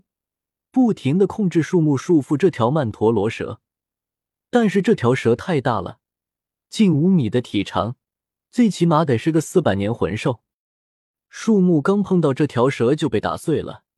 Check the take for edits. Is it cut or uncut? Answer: uncut